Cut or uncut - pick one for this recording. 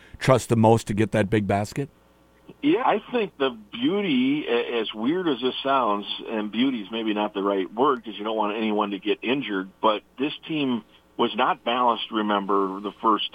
cut